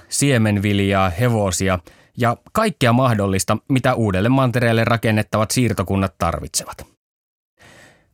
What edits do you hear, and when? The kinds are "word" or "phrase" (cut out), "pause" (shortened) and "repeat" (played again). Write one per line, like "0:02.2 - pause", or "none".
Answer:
none